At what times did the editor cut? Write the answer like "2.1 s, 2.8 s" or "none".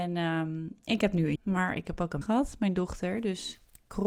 1.4 s, 2.2 s